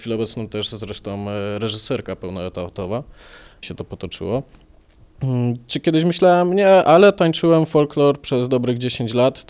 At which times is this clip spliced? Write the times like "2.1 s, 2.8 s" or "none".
3.6 s